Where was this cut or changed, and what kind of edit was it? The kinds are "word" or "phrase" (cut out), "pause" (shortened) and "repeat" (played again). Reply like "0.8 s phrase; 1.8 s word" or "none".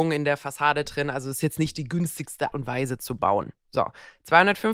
2.5 s word